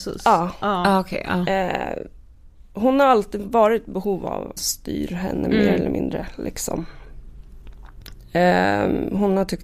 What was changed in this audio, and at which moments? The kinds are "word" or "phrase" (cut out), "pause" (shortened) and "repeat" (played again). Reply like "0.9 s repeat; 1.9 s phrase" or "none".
4.6 s phrase